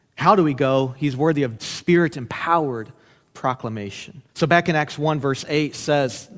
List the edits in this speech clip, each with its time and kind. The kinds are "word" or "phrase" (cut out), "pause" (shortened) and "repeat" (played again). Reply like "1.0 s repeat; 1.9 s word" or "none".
1.6 s word; 4.3 s pause